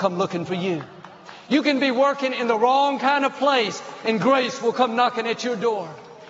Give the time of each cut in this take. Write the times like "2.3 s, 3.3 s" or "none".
none